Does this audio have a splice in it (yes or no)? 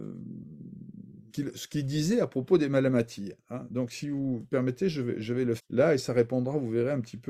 yes